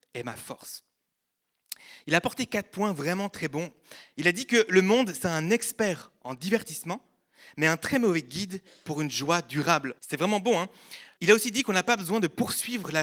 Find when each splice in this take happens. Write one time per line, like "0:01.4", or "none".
0:10.0
0:11.2